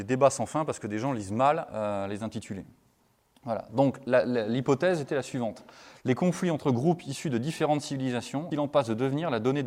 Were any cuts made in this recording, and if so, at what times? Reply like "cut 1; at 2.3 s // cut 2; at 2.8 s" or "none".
cut 1; at 8.5 s

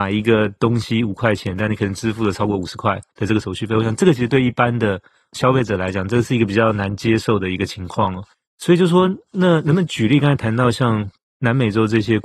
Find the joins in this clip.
cut 1; at 3.1 s // cut 2; at 8.3 s

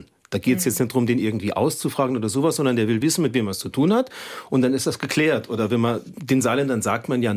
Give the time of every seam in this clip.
none

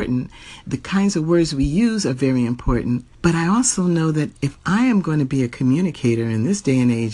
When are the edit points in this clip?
cut 1; at 3.1 s

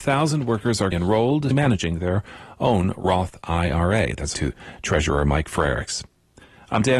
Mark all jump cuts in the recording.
cut 1; at 0.9 s // cut 2; at 1.5 s // cut 3; at 4.3 s

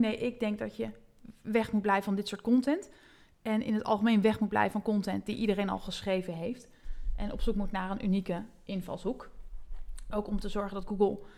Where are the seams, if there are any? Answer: none

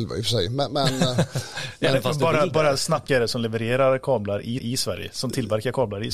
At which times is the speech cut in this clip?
cut 1; at 3.1 s // cut 2; at 4.6 s

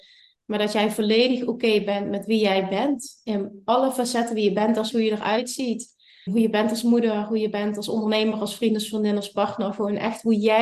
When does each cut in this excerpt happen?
cut 1; at 4.9 s // cut 2; at 6.3 s

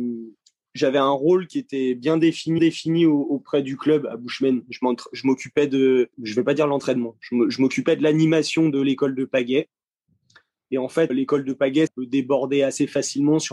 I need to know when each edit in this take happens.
cut 1; at 2.6 s // cut 2; at 6.1 s // cut 3; at 11.1 s // cut 4; at 11.9 s

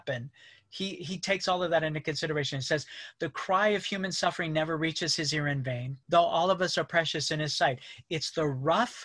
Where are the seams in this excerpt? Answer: cut 1; at 6.0 s

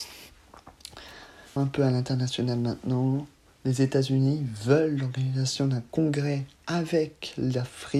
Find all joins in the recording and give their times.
cut 1; at 1.6 s

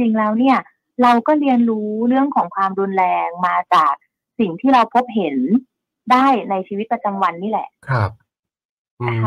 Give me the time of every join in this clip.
cut 1; at 7.8 s

